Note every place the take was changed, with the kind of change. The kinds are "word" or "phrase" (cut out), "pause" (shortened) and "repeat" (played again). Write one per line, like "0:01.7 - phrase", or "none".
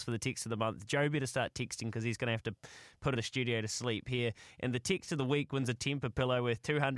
0:03.2 - word